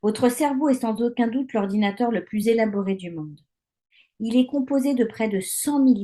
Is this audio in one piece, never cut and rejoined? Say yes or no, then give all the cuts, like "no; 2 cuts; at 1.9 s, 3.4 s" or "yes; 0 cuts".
yes; 0 cuts